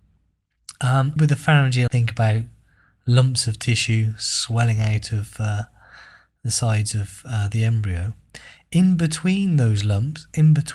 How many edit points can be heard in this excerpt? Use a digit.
2